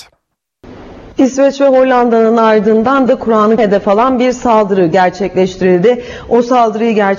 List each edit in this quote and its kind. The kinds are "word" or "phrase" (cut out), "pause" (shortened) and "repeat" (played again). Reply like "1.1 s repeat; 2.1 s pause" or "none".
1.1 s pause; 3.1 s word; 3.6 s word